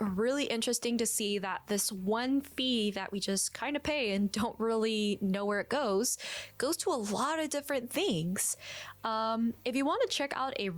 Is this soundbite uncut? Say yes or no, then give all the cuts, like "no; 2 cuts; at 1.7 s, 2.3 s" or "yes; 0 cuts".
yes; 0 cuts